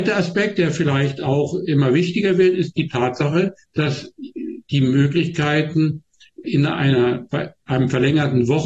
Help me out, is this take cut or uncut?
cut